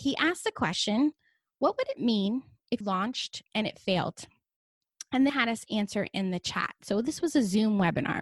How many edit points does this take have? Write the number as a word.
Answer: two